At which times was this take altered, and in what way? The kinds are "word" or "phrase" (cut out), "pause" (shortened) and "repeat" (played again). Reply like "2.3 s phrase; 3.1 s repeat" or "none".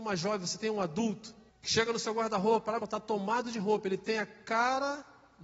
1.5 s pause; 2.8 s phrase